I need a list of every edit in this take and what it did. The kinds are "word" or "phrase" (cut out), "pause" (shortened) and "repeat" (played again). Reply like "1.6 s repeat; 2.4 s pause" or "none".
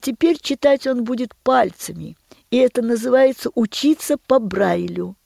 none